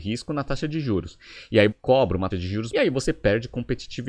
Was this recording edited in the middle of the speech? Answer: yes; 3 cuts; at 1.7 s, 2.3 s, 2.7 s

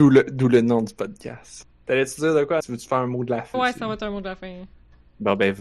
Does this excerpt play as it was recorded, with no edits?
no; 3 cuts; at 1.7 s, 2.6 s, 3.5 s

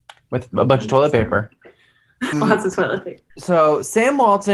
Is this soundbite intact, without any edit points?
no; 2 cuts; at 2.3 s, 3.3 s

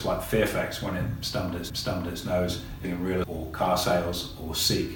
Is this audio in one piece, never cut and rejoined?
no; 3 cuts; at 1.7 s, 2.8 s, 3.2 s

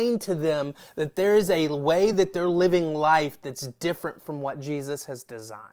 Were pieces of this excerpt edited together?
no; 0 cuts

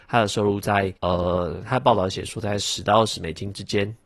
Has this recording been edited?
yes; 1 cut; at 1.0 s

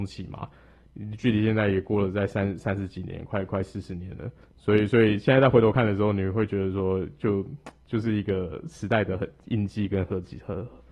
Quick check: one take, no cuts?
no; 1 cut; at 4.4 s

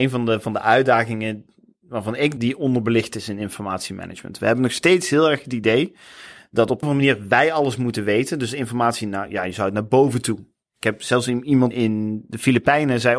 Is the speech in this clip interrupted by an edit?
yes; 3 cuts; at 2.4 s, 6.8 s, 11.7 s

